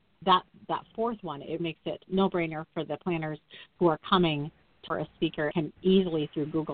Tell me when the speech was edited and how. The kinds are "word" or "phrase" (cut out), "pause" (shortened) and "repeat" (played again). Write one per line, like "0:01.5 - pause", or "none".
0:01.6 - word
0:02.1 - word
0:04.9 - word
0:05.5 - word

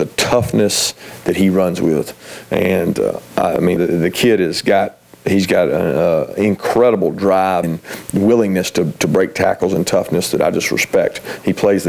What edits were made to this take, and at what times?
0:03.8 - word
0:07.6 - phrase

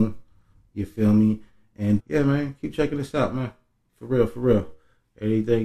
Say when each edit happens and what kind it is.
0:02.0 - word

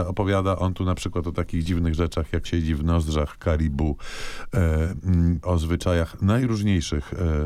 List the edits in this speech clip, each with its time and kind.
0:02.5 - word
0:05.4 - word

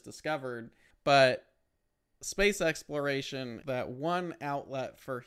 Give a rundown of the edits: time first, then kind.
0:00.9 - pause
0:03.6 - word

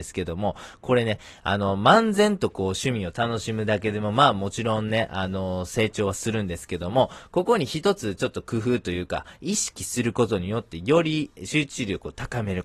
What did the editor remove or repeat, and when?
none

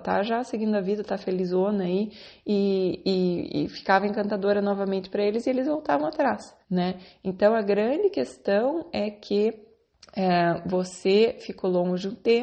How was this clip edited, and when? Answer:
0:06.6 - pause
0:09.9 - pause

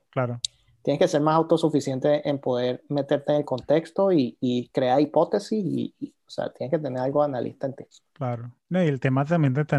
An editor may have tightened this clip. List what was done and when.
0:07.9 - pause

